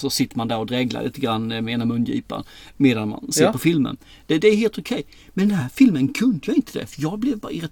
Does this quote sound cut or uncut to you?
uncut